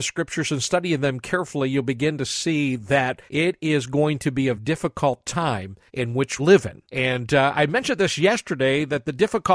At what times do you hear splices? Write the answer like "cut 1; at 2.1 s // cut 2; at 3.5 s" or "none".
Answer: cut 1; at 3.3 s // cut 2; at 4.6 s // cut 3; at 5.9 s // cut 4; at 6.4 s // cut 5; at 6.8 s